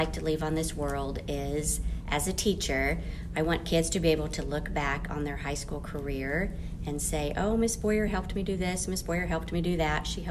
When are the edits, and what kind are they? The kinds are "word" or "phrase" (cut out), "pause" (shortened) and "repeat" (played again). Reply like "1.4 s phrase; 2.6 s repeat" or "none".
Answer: none